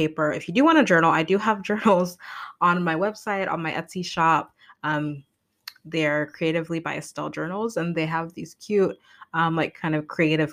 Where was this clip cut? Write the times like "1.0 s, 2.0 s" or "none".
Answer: none